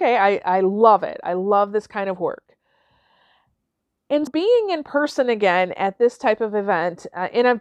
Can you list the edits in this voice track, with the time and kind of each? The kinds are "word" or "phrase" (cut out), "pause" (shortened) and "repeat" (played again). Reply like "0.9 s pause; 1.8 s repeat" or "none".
4.3 s word